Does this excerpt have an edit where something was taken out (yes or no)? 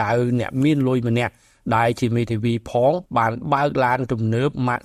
yes